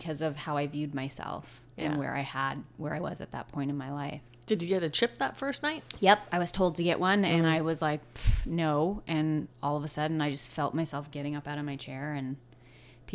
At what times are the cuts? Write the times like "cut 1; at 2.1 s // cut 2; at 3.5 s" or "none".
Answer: cut 1; at 9.5 s